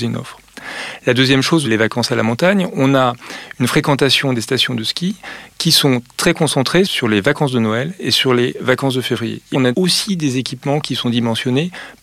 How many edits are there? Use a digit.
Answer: 2